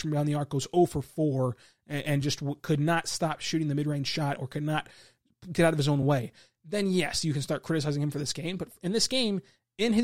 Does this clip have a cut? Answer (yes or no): no